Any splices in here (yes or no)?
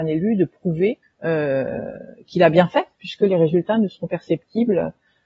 yes